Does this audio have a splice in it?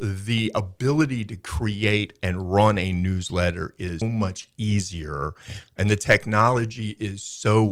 yes; 1 cut; at 4.0 s

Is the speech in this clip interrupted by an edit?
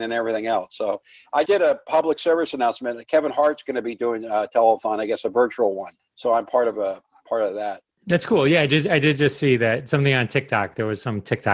yes; 1 cut; at 1.5 s

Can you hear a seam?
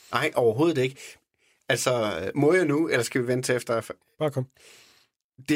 no; 0 cuts

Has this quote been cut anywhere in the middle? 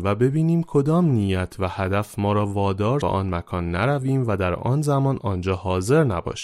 yes; 1 cut; at 3.0 s

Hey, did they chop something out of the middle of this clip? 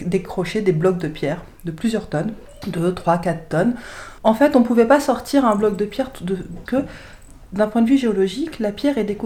yes; 2 cuts; at 4.2 s, 6.7 s

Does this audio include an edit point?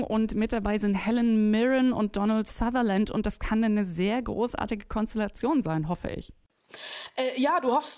no; 0 cuts

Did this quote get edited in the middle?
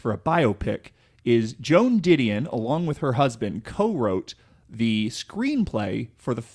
no; 0 cuts

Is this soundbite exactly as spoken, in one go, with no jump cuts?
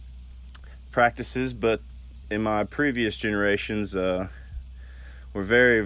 yes; 0 cuts

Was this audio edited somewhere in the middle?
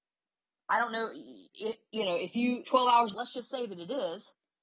yes; 3 cuts; at 1.5 s, 2.6 s, 3.1 s

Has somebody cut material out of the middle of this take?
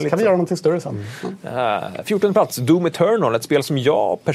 no; 0 cuts

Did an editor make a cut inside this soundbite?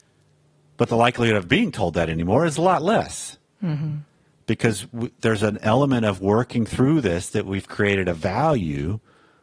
no; 0 cuts

